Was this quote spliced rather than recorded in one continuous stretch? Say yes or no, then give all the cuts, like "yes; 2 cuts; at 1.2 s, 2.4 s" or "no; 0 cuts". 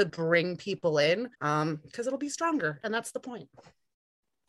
yes; 1 cut; at 1.3 s